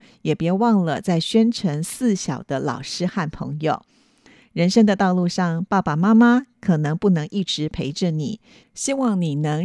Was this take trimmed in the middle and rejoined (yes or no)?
no